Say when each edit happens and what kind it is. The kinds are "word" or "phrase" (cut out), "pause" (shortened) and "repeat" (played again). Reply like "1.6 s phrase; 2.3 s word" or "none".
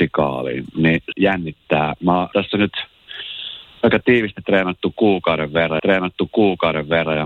1.1 s word; 2.3 s word; 5.8 s repeat